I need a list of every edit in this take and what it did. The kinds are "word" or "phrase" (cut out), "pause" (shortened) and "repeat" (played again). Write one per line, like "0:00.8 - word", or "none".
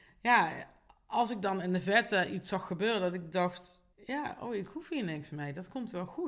0:03.9 - pause